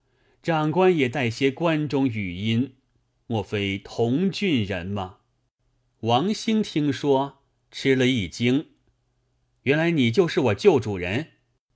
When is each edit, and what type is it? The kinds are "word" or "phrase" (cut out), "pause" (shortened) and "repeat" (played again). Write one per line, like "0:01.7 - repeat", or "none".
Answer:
none